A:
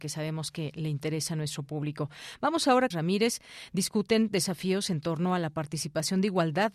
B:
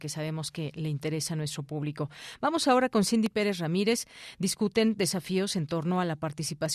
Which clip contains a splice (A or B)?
A